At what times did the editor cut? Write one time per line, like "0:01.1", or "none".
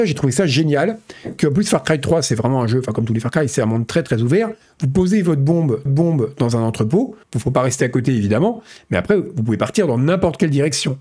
0:05.9
0:07.2